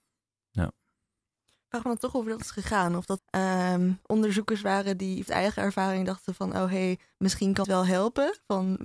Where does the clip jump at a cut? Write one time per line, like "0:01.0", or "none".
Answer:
0:03.2
0:05.3
0:07.6